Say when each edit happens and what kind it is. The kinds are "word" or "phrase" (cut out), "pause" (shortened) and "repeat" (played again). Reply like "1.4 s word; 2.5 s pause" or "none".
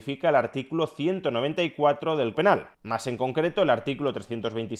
2.3 s word; 2.7 s pause